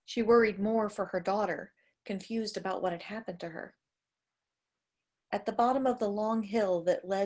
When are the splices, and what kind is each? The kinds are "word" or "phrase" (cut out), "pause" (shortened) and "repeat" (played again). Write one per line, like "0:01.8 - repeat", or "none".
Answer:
none